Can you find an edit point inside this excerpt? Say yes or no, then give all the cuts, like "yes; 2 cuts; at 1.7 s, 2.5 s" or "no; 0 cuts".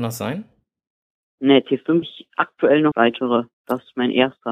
yes; 2 cuts; at 2.0 s, 2.9 s